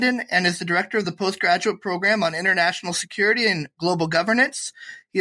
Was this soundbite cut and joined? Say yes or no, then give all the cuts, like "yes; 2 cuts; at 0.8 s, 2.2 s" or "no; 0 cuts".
no; 0 cuts